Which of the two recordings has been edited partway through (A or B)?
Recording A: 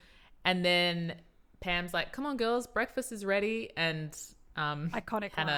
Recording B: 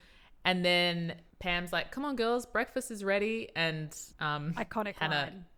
B